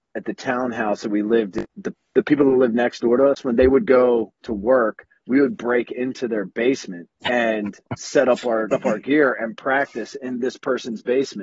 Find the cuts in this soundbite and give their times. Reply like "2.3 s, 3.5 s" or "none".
1.7 s, 4.3 s, 7.2 s, 8.7 s